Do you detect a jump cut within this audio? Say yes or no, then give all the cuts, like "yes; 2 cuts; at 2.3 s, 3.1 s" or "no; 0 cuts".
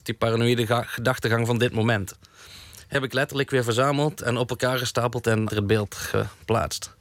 yes; 2 cuts; at 2.9 s, 5.5 s